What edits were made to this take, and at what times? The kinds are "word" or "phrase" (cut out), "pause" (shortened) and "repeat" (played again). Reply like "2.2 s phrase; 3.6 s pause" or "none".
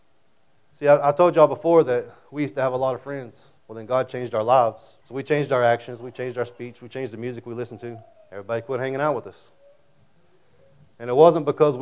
3.6 s pause; 5.0 s pause; 8.2 s pause